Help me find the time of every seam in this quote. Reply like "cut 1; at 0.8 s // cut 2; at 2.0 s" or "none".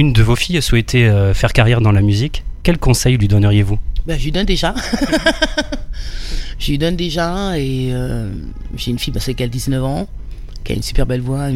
none